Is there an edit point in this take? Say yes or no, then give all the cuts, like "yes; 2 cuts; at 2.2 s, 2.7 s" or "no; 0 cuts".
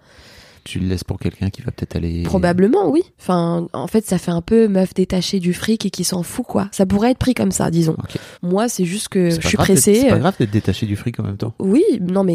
yes; 2 cuts; at 3.1 s, 8.3 s